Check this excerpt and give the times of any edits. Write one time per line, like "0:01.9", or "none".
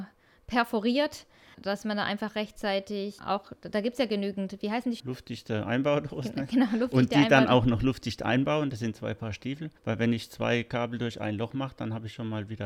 0:01.5
0:03.2
0:05.0
0:09.8